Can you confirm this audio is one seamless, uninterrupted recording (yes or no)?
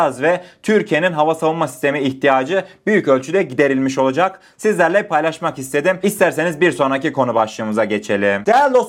yes